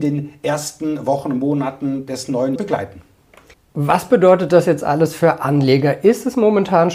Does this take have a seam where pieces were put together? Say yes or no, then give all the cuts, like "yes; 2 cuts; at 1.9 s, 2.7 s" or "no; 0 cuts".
yes; 2 cuts; at 2.6 s, 3.5 s